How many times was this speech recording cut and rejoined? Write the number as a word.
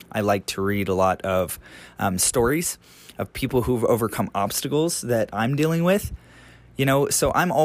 zero